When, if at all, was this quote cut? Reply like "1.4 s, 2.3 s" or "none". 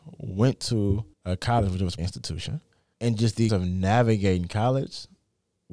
1.1 s, 2.0 s, 2.9 s, 3.5 s